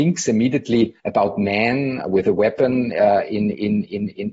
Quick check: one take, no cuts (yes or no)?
no